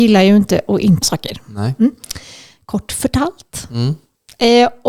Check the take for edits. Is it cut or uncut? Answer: cut